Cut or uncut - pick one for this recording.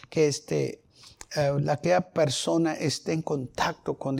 uncut